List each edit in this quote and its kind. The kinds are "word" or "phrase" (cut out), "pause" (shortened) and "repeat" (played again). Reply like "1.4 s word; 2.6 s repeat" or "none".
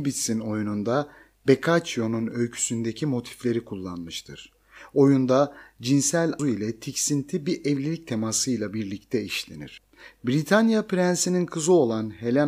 6.4 s word

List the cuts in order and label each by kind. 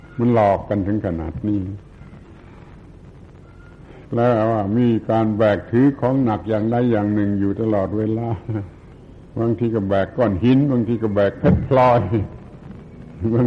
4.0 s pause; 8.9 s pause

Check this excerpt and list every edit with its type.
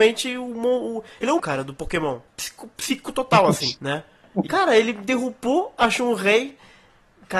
1.4 s word; 2.3 s pause; 3.8 s pause; 4.5 s word

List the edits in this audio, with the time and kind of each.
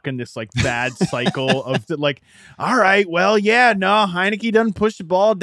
1.9 s phrase

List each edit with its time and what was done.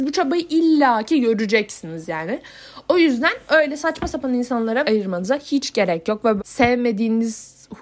4.8 s word; 6.4 s phrase

